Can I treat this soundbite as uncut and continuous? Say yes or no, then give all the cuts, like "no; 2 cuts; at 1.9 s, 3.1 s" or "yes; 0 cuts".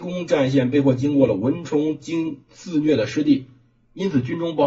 yes; 0 cuts